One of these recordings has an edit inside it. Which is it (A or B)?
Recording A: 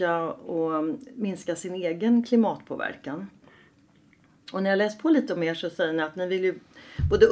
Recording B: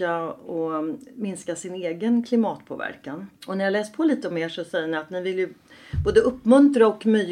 B